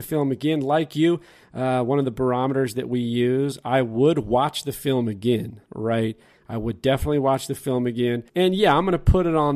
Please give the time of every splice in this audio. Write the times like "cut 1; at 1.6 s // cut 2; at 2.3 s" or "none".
cut 1; at 5.6 s // cut 2; at 8.3 s